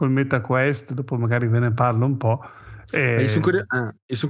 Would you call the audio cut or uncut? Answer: uncut